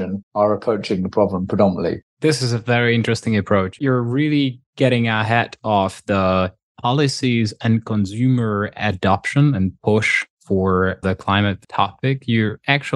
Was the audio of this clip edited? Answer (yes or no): yes